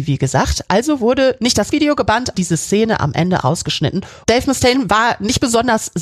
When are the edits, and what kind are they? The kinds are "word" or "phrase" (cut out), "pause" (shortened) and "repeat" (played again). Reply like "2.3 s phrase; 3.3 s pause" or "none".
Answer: 1.7 s word; 2.3 s word; 3.4 s word